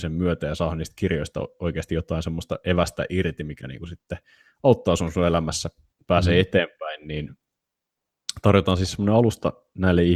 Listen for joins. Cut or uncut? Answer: uncut